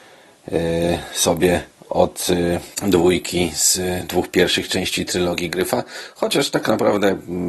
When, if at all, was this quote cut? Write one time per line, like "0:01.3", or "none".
0:01.7
0:02.7